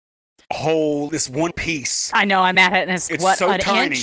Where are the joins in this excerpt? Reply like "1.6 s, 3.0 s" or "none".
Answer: 1.1 s, 1.5 s, 2.5 s, 3.1 s